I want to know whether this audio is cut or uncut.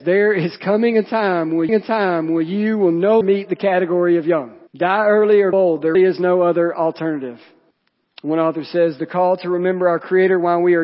cut